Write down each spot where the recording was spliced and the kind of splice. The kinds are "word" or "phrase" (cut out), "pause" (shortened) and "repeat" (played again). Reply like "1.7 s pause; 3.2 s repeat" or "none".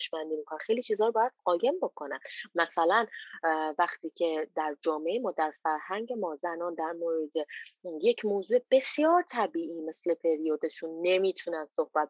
1.4 s pause